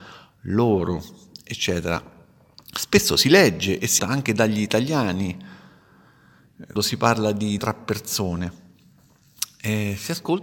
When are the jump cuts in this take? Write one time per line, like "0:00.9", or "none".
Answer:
0:04.0
0:06.8
0:07.6